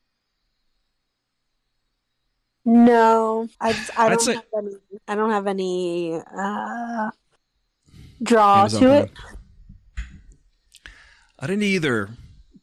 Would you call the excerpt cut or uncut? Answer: cut